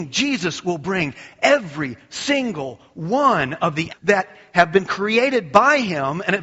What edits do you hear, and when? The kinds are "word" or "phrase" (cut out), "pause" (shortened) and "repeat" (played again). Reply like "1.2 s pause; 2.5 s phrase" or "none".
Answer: 3.9 s word